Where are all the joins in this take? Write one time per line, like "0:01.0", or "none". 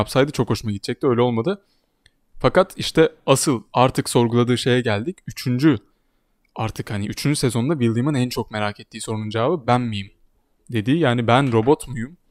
0:09.6